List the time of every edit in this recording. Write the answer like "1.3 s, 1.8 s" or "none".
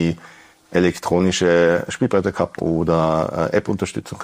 1.9 s, 2.6 s